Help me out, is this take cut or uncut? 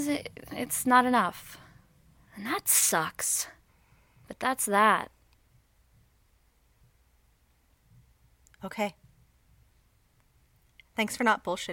uncut